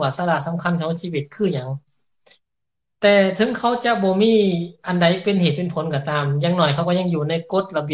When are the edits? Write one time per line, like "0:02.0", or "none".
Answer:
none